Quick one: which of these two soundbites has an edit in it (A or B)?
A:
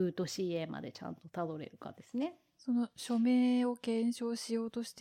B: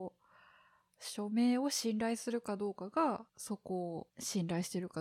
B